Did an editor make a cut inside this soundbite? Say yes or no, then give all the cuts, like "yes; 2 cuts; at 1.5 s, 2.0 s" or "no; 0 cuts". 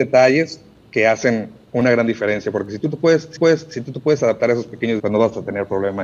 yes; 2 cuts; at 3.4 s, 5.0 s